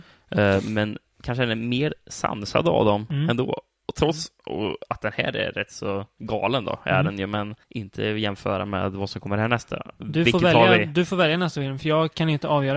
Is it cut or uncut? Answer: cut